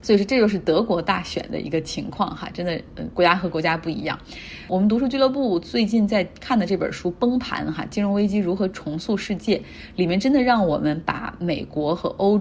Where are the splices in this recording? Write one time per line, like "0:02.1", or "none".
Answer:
none